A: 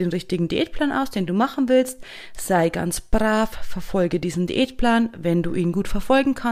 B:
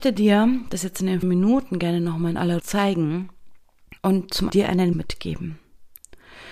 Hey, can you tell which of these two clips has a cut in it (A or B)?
B